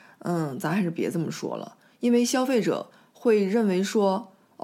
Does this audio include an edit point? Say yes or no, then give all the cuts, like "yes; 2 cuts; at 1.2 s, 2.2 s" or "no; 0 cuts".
no; 0 cuts